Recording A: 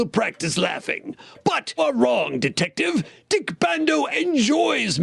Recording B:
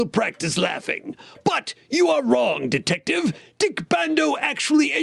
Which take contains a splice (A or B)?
A